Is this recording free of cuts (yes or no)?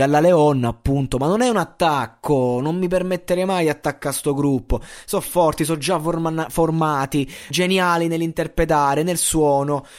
no